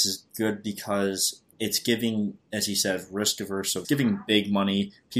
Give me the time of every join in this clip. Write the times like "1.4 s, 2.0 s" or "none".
1.5 s, 2.4 s, 3.8 s

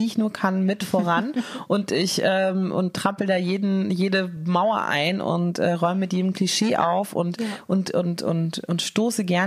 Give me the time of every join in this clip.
none

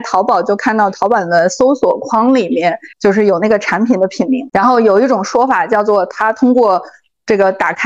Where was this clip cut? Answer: 2.9 s

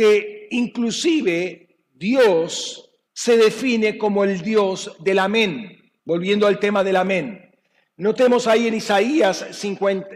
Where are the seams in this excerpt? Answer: 3.1 s, 6.0 s

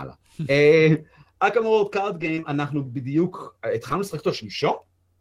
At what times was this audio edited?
none

